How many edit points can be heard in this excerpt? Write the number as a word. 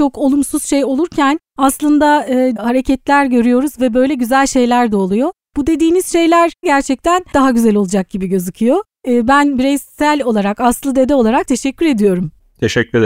four